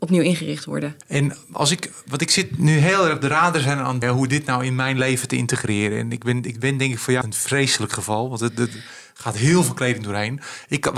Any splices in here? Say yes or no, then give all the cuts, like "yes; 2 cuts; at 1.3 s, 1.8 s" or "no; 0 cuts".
yes; 3 cuts; at 1.0 s, 4.0 s, 7.2 s